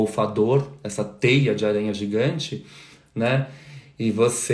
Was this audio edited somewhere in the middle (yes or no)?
no